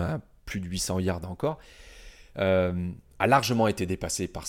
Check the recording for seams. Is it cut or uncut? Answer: uncut